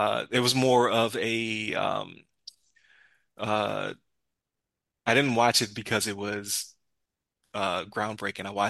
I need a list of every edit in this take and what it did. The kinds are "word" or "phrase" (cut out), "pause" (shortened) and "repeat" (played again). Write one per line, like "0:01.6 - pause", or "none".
none